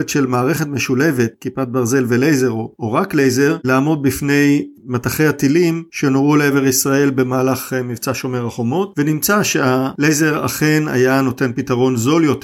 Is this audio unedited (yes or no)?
yes